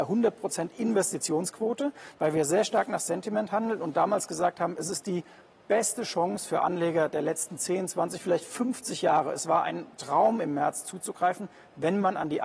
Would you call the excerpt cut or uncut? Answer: uncut